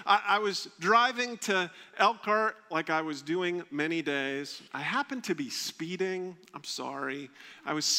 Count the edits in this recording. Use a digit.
1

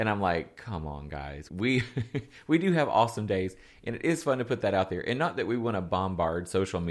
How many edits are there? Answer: 1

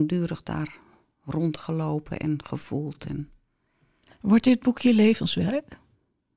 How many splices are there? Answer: 0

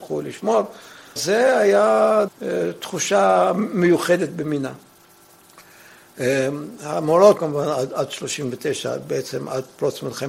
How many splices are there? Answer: 3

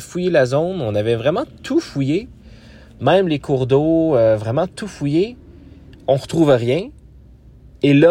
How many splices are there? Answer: 0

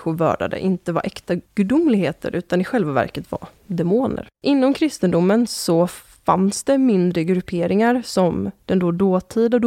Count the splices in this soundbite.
2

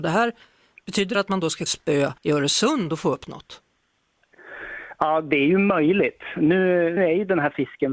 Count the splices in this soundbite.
4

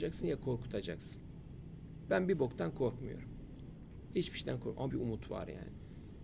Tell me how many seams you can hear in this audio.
1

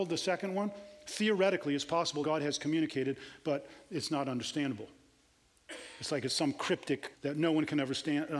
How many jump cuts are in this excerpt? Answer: 2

